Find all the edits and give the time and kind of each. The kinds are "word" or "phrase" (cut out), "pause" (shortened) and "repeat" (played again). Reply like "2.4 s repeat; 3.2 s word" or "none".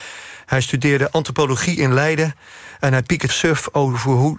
3.3 s word

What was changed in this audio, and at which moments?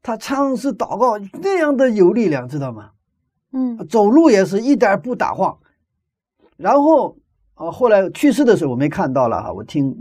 none

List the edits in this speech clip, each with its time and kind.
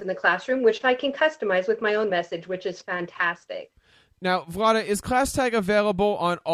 none

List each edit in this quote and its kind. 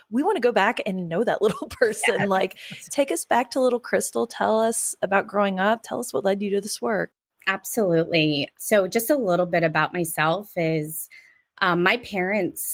8.5 s word

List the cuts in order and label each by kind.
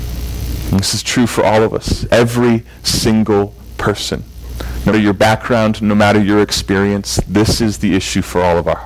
4.9 s word

